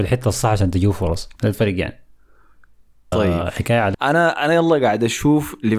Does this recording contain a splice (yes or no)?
yes